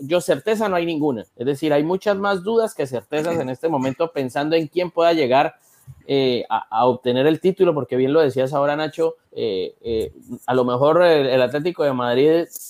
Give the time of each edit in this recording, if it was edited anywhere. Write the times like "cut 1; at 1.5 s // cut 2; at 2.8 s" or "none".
cut 1; at 1.3 s // cut 2; at 9.2 s